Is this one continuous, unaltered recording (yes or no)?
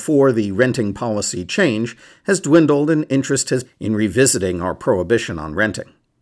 no